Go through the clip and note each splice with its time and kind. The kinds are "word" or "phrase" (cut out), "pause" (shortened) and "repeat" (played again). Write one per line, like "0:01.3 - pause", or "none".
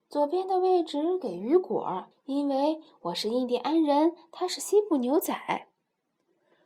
0:02.1 - pause